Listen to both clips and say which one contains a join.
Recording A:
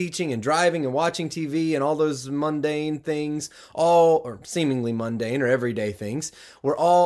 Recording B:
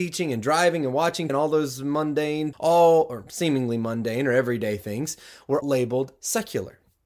B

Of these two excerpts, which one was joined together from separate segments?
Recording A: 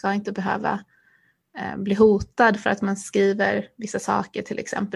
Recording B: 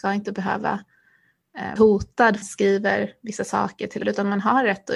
B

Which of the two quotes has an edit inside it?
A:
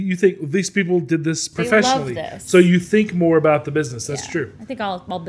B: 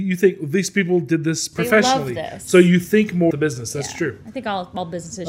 B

